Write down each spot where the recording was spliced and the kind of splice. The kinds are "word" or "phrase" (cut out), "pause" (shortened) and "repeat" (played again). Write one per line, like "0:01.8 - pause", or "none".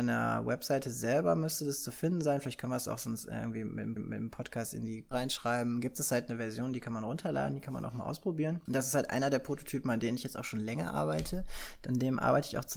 0:04.0 - repeat
0:05.1 - phrase